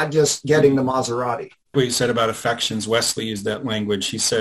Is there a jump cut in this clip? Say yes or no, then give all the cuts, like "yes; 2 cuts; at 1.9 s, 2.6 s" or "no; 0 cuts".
yes; 1 cut; at 1.7 s